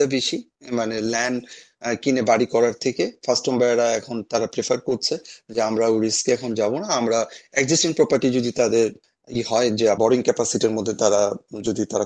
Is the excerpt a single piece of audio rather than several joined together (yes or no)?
no